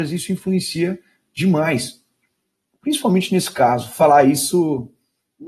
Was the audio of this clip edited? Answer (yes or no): no